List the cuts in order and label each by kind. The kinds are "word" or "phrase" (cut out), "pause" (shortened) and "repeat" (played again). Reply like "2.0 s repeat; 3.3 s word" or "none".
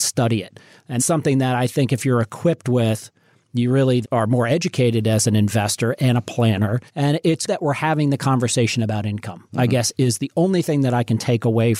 1.0 s word; 4.0 s word; 6.9 s pause; 7.5 s word

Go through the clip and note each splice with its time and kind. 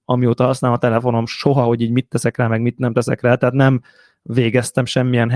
none

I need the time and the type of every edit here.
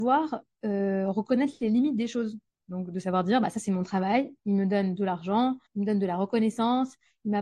4.4 s pause; 5.7 s pause

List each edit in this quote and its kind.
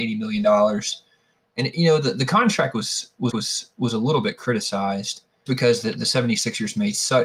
3.3 s repeat; 5.5 s word

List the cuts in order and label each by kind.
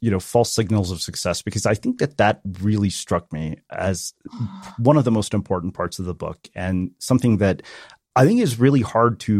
none

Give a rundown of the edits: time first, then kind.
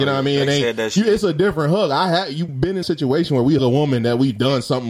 2.5 s word; 2.8 s word; 3.6 s word

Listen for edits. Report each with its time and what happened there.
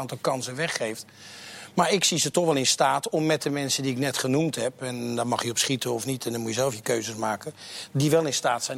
none

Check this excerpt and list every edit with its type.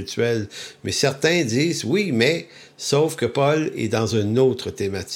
none

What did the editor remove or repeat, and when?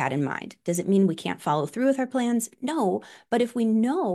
none

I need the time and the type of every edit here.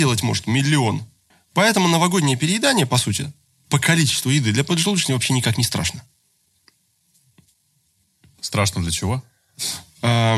1.3 s pause

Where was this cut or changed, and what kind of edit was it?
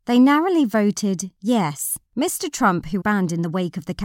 2.1 s pause; 3.0 s word

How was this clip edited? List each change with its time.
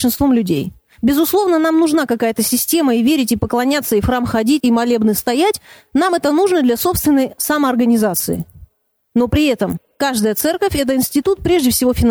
4.6 s phrase

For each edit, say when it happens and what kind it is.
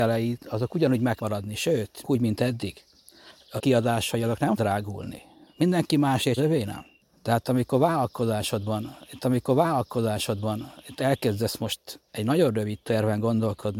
1.2 s word; 2.0 s word; 3.6 s word; 4.6 s word; 6.4 s phrase; 9.2 s repeat; 12.1 s pause; 12.8 s word

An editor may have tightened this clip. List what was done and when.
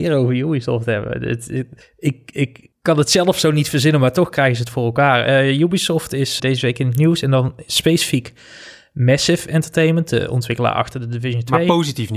1.8 s pause; 2.7 s pause; 6.4 s word

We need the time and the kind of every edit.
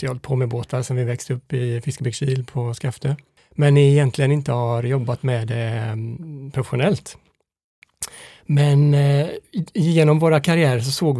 3.4 s pause

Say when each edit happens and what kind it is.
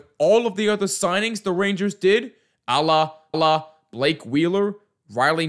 3.3 s repeat

